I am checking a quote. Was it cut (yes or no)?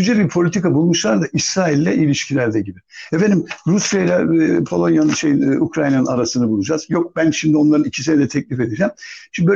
no